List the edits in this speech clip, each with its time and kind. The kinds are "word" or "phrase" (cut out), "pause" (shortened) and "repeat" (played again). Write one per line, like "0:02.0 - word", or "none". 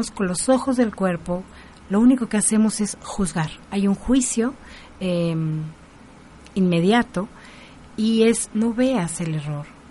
0:03.6 - pause
0:08.5 - word